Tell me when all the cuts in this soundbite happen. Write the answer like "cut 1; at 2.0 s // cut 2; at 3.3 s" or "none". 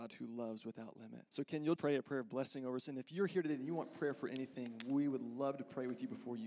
cut 1; at 1.3 s // cut 2; at 1.8 s